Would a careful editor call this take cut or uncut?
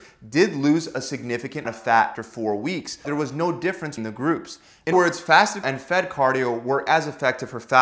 cut